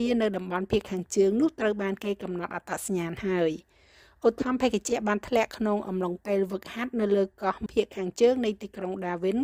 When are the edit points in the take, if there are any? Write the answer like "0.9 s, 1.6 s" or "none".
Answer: 7.7 s